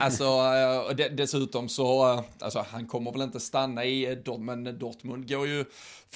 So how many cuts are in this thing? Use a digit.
0